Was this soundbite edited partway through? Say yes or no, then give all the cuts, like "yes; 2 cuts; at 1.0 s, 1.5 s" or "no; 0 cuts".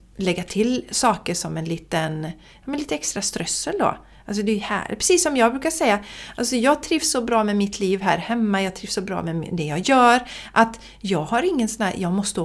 no; 0 cuts